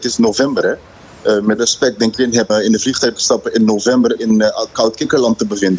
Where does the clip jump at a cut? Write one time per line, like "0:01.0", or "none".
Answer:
0:01.6
0:02.1
0:02.5
0:04.2